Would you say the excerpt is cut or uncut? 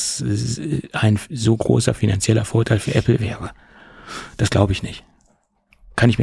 uncut